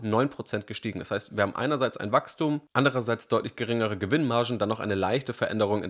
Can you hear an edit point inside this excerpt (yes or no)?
no